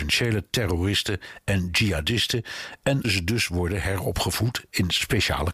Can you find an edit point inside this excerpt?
yes; 1 cut; at 3.0 s

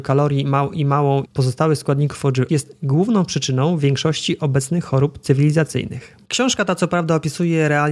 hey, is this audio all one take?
no; 3 cuts; at 1.2 s, 2.5 s, 6.2 s

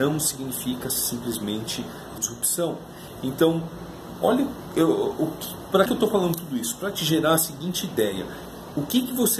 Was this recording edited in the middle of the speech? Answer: yes; 2 cuts; at 2.2 s, 5.9 s

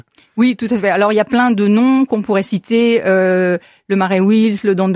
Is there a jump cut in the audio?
no; 0 cuts

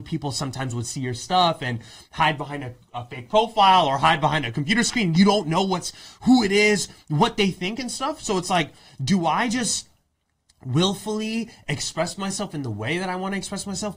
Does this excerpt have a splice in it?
no; 0 cuts

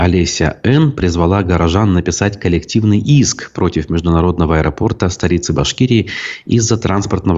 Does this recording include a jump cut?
no; 0 cuts

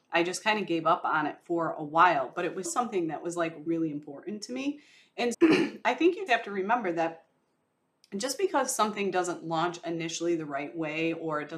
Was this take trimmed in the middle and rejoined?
yes; 4 cuts; at 2.6 s, 3.7 s, 5.3 s, 6.3 s

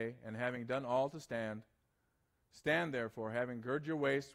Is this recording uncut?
yes; 0 cuts

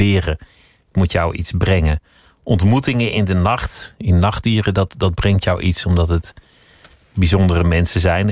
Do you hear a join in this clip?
no; 0 cuts

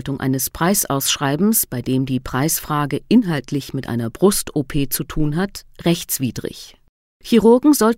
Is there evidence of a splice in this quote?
no; 0 cuts

